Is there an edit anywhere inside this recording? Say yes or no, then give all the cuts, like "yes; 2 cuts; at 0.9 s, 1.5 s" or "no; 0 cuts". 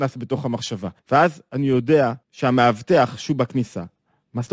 yes; 2 cuts; at 1.0 s, 2.2 s